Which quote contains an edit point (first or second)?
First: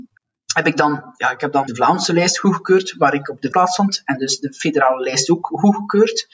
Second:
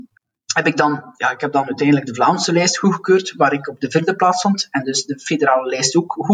first